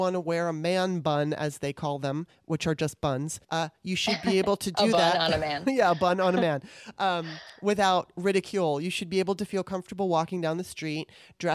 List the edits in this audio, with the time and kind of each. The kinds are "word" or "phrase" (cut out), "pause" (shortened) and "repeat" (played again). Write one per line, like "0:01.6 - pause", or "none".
0:03.4 - pause